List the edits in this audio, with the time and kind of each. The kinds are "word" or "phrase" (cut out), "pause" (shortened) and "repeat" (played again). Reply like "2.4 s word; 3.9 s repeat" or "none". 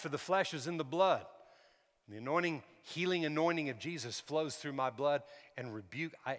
none